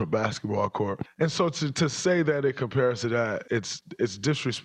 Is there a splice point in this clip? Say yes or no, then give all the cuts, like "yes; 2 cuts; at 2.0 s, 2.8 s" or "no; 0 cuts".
yes; 1 cut; at 3.4 s